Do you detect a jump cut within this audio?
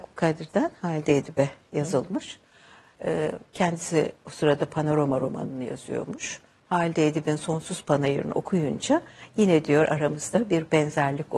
no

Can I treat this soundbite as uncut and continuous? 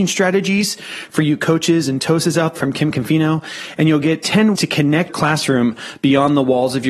no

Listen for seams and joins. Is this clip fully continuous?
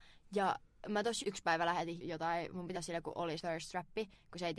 no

